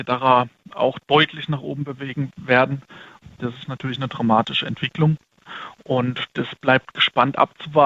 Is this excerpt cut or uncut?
uncut